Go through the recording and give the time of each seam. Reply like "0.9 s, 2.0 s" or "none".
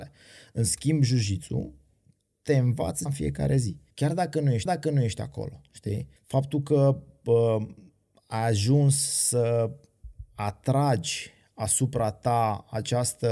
3.1 s, 3.9 s, 4.7 s, 6.2 s